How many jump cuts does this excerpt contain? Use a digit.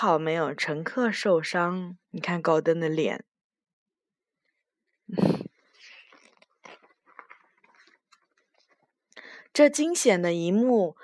1